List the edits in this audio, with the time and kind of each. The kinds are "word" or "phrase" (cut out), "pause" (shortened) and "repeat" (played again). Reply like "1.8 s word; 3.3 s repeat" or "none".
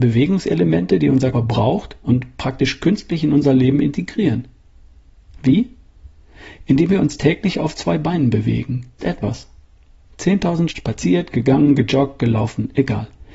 1.3 s word; 2.0 s word; 9.0 s word; 10.7 s word